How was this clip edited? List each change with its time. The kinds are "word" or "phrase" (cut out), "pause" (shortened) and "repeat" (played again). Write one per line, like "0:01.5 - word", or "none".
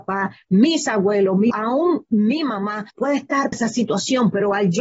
0:01.5 - word
0:02.9 - pause
0:03.5 - word